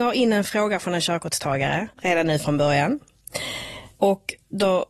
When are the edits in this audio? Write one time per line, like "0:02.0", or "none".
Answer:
0:01.9
0:03.9